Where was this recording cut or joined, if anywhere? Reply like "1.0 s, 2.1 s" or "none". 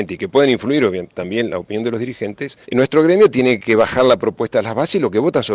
2.6 s

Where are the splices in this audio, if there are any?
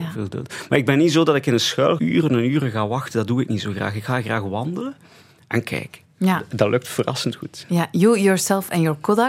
2.0 s

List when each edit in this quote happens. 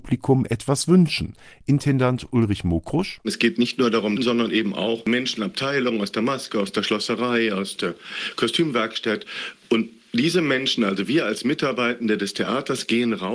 4.2 s, 5.4 s

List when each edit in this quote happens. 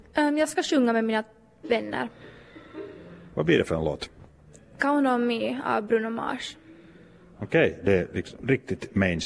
none

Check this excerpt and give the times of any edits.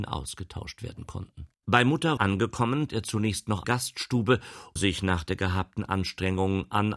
1.5 s, 2.2 s, 2.9 s, 3.6 s, 4.8 s

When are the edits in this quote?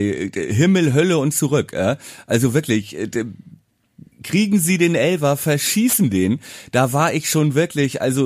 4.1 s

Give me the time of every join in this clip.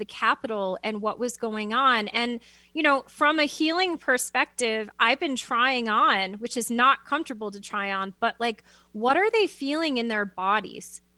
none

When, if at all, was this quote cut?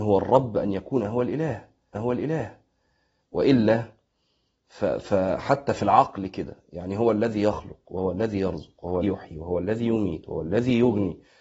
1.9 s, 9.0 s

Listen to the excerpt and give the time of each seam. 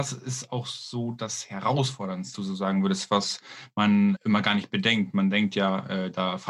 2.3 s, 4.2 s

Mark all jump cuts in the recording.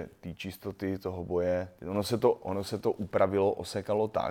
1.8 s

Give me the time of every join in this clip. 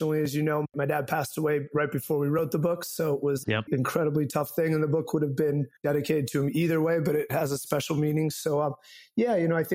3.4 s, 5.8 s

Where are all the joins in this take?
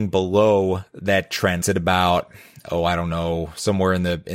1.6 s

